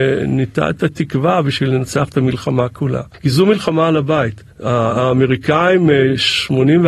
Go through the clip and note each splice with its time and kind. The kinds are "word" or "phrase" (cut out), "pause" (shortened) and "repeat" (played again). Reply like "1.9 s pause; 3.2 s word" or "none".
3.1 s pause; 4.5 s pause